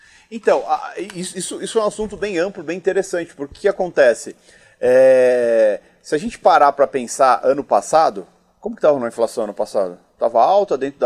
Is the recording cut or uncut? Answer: uncut